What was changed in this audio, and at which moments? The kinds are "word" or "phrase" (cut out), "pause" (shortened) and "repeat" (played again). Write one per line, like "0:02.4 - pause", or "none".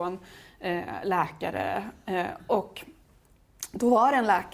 none

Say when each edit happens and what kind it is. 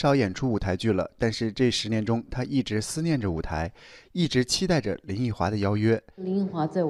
none

